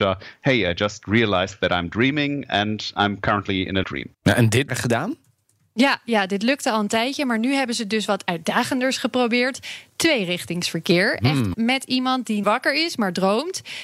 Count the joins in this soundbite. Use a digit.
5